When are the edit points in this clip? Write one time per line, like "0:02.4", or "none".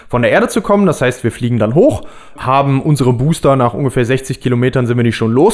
0:02.4